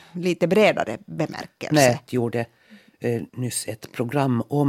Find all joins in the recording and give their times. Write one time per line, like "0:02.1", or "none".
0:02.1
0:03.3